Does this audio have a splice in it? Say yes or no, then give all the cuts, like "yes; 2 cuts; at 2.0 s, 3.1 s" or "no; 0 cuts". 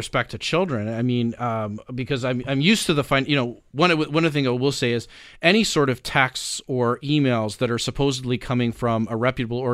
no; 0 cuts